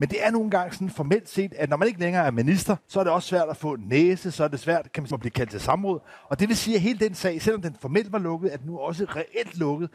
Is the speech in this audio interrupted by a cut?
yes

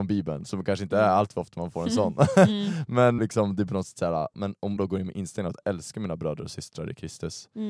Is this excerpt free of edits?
no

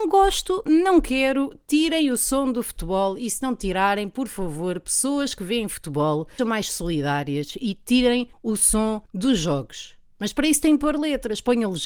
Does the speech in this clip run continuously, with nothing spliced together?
no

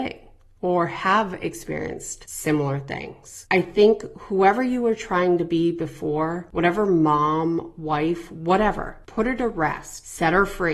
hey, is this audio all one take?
yes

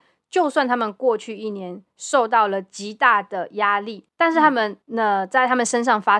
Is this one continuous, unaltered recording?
no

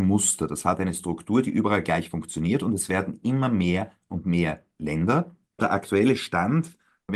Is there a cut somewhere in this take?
no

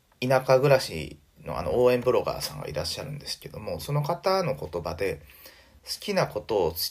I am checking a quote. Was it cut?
no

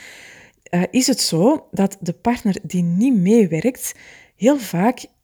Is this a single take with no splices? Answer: yes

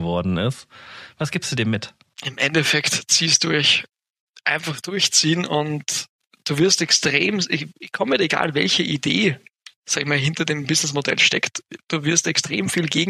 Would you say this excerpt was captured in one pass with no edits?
yes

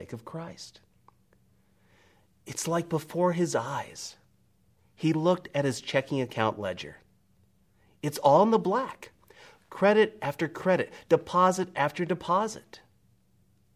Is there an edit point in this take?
no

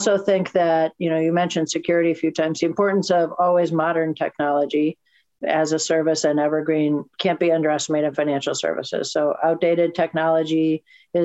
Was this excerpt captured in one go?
yes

